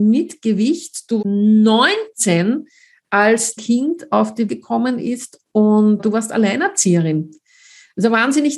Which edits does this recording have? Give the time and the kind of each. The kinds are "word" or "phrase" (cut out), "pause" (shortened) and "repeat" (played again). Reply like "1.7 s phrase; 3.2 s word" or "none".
1.2 s word; 3.6 s word; 4.5 s word; 6.0 s word